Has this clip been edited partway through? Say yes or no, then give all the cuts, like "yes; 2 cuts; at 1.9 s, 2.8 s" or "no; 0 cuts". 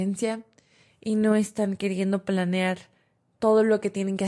no; 0 cuts